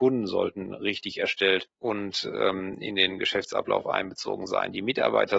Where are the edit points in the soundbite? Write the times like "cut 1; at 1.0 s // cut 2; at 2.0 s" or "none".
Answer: none